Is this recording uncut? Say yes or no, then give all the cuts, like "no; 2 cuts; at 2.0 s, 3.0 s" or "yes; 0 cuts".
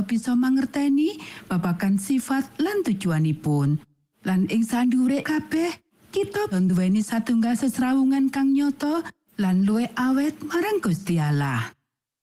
no; 2 cuts; at 5.2 s, 6.5 s